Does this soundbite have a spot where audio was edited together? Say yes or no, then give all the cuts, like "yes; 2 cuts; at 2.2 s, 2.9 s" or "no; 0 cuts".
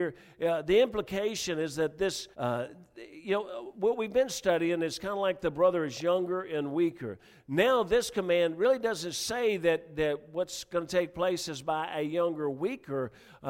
yes; 1 cut; at 2.3 s